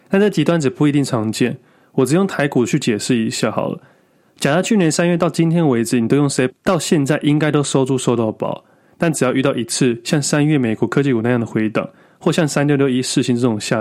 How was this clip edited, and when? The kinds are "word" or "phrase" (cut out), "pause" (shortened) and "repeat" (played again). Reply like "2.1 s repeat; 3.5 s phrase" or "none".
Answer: 6.5 s word

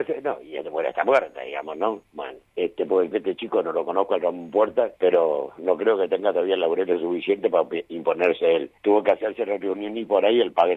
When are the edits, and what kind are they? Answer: 2.5 s pause; 3.1 s word; 5.0 s pause; 8.8 s pause

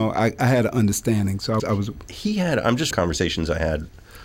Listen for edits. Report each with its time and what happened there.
1.6 s word; 2.9 s word

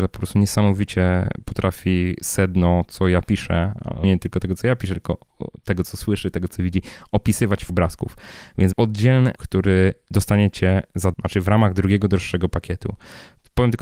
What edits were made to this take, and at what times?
2.9 s word; 4.0 s word; 7.7 s word; 8.7 s word; 9.4 s word; 11.1 s word

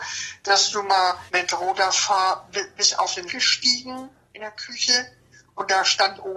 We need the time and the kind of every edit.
1.3 s pause; 3.3 s word

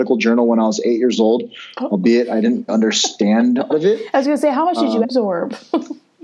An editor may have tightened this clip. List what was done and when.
2.7 s word; 3.7 s word; 5.0 s word

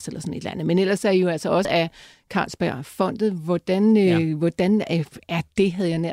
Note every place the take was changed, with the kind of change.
1.6 s word

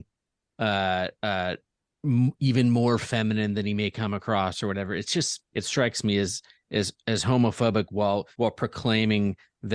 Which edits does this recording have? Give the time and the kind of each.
5.5 s pause; 8.3 s pause

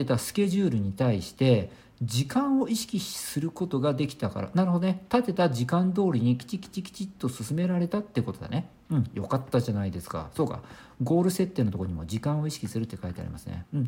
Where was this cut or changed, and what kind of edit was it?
none

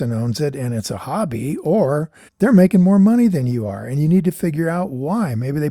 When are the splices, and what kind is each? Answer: 2.3 s pause

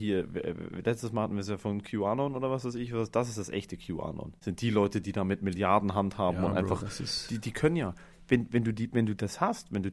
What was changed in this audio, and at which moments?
none

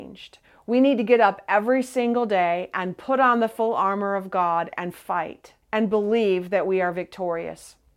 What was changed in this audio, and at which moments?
5.6 s pause

